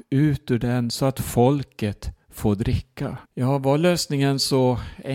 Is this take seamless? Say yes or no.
no